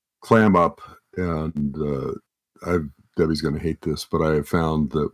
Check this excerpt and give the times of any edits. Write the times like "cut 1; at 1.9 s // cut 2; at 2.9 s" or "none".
none